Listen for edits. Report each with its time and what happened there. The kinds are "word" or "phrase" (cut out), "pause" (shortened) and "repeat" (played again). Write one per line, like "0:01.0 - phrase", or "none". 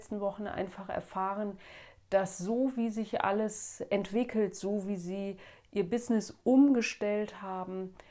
none